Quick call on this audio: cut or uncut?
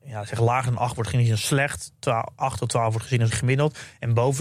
cut